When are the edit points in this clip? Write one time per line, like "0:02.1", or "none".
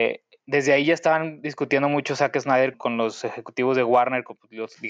0:02.7